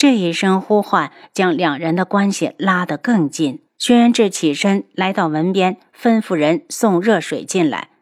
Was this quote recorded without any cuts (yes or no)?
no